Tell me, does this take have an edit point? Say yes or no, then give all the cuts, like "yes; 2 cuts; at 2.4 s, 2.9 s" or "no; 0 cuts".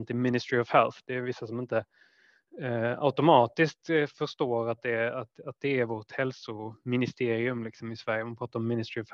no; 0 cuts